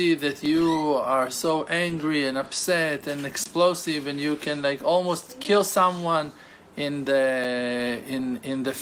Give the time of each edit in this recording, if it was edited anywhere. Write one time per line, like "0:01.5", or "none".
none